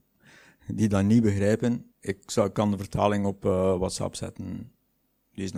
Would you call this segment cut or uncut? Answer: cut